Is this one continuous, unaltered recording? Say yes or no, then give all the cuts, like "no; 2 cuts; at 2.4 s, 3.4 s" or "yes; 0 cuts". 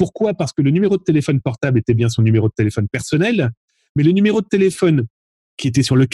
yes; 0 cuts